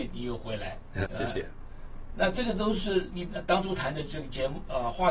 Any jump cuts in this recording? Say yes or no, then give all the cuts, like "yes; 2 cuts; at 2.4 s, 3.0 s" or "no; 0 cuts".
yes; 1 cut; at 1.1 s